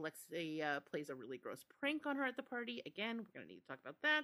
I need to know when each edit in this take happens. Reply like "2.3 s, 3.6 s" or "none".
none